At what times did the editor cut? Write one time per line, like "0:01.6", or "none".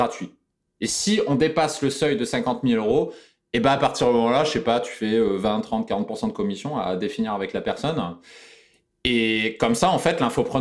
none